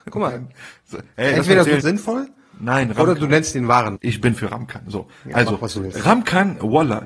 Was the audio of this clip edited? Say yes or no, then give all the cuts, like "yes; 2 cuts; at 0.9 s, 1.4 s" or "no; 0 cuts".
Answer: yes; 2 cuts; at 1.8 s, 4.0 s